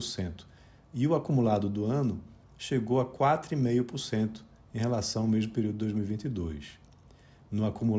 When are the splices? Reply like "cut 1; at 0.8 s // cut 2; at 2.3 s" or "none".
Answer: none